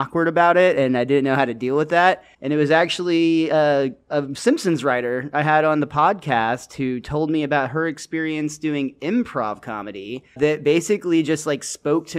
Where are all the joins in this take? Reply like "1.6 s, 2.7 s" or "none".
none